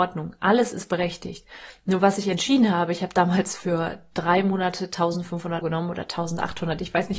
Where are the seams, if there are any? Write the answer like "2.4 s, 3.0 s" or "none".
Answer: 5.6 s